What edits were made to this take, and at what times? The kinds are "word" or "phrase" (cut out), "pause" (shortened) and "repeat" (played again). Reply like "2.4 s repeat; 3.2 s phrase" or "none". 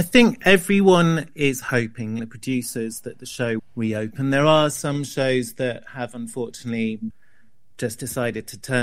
2.2 s word; 3.6 s word